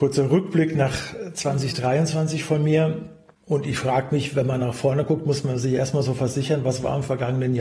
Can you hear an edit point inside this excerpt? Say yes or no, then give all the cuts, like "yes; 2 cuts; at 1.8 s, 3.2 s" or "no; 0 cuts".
no; 0 cuts